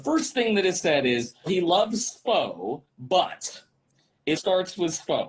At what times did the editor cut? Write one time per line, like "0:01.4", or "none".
0:01.5
0:02.9
0:04.4